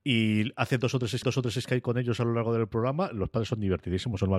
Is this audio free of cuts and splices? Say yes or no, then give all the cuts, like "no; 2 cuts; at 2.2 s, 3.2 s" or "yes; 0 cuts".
no; 1 cut; at 1.2 s